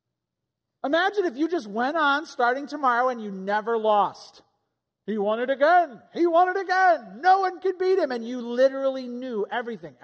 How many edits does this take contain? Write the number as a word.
zero